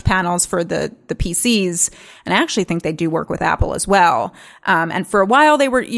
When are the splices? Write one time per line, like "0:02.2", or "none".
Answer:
none